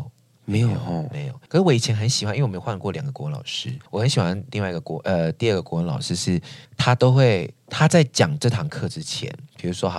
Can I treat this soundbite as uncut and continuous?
no; 4 cuts; at 1.5 s, 3.9 s, 6.6 s, 7.6 s

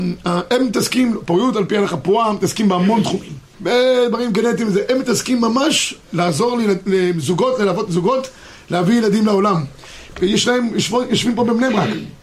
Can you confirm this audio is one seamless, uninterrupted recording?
no; 1 cut; at 3.5 s

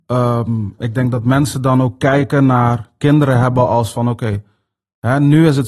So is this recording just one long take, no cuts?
yes; 0 cuts

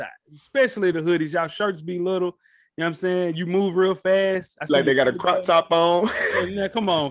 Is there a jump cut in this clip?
no; 0 cuts

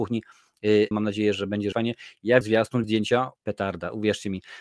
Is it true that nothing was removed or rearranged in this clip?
no; 6 cuts; at 0.9 s, 1.3 s, 1.7 s, 2.4 s, 2.8 s, 3.4 s

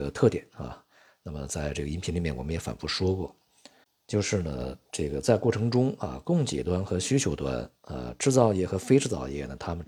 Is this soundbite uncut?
yes; 0 cuts

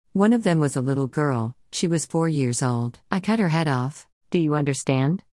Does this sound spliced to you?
yes; 2 cuts; at 3.0 s, 4.2 s

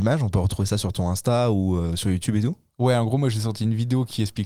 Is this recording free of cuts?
yes; 0 cuts

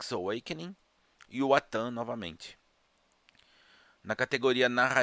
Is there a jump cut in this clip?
no; 0 cuts

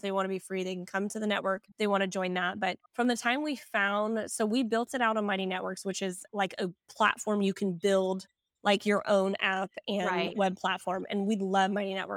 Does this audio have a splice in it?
no; 0 cuts

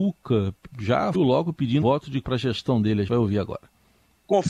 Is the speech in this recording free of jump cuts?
no; 4 cuts; at 1.1 s, 1.8 s, 2.2 s, 3.1 s

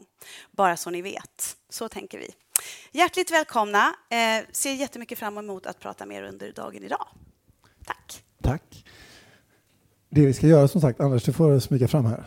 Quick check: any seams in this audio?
no; 0 cuts

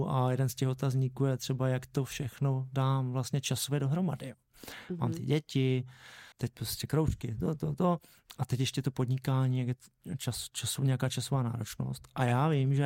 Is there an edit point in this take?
yes; 1 cut; at 6.3 s

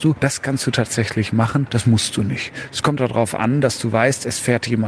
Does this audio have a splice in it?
yes; 2 cuts; at 1.7 s, 3.0 s

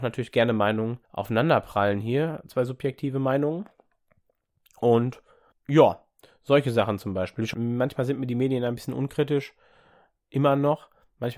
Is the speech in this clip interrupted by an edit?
yes; 3 cuts; at 1.0 s, 5.5 s, 7.5 s

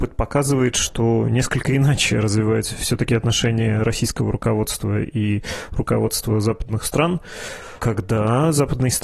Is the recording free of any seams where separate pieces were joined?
yes; 0 cuts

